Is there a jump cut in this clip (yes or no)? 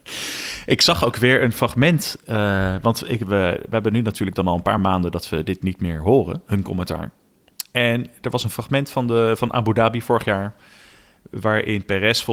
no